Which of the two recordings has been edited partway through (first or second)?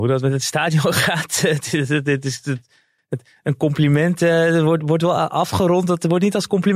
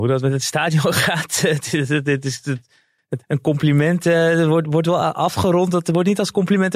second